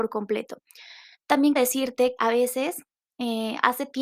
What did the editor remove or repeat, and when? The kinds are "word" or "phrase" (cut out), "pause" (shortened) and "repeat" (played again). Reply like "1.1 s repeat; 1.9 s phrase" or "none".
1.6 s word; 2.2 s word